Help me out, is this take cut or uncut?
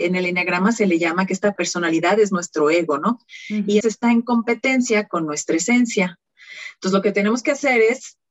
cut